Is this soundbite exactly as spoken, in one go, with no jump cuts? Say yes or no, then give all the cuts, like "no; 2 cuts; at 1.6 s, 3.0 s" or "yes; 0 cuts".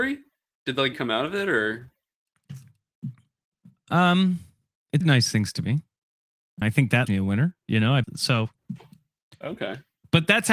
no; 5 cuts; at 0.9 s, 5.0 s, 6.6 s, 7.1 s, 8.0 s